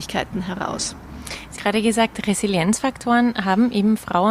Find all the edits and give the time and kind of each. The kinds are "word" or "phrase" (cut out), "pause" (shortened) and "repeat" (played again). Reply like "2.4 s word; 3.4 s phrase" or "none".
1.6 s phrase